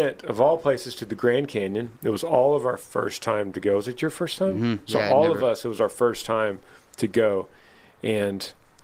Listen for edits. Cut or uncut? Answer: uncut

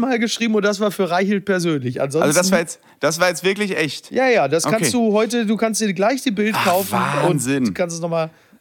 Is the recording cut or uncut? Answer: uncut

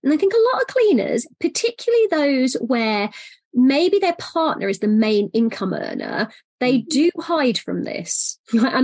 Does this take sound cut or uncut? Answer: uncut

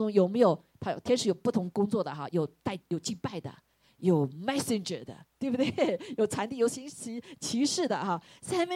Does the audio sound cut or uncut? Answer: uncut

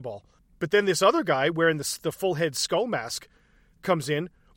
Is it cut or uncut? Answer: uncut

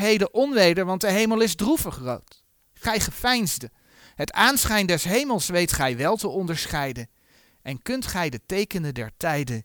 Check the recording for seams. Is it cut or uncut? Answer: uncut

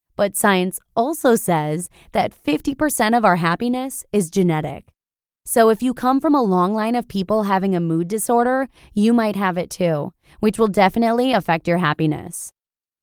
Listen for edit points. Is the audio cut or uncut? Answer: uncut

